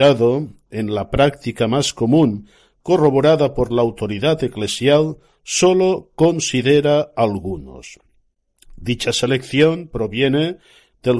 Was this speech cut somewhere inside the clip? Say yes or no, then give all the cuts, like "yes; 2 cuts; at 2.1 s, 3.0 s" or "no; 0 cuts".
no; 0 cuts